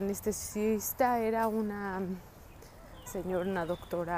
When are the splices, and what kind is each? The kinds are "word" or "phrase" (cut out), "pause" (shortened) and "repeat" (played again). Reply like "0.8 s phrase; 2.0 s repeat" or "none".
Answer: 3.1 s word